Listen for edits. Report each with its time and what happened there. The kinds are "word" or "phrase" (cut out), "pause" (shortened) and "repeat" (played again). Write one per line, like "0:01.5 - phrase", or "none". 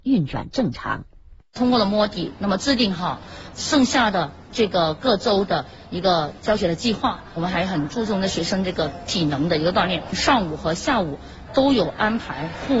0:03.5 - word